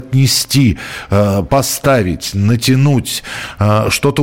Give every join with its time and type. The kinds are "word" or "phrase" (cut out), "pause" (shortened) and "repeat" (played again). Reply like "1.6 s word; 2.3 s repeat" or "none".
1.5 s word